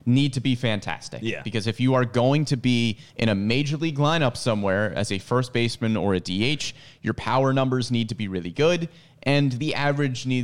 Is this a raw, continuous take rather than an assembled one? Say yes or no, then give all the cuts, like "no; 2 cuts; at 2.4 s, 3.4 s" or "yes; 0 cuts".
no; 1 cut; at 3.1 s